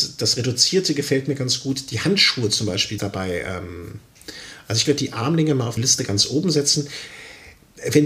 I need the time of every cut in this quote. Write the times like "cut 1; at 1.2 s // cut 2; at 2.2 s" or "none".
cut 1; at 3.0 s // cut 2; at 4.8 s // cut 3; at 5.8 s